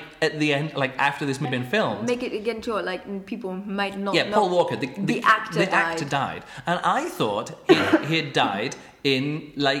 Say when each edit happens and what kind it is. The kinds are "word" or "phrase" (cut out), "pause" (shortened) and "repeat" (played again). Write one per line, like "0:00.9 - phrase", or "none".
0:01.4 - word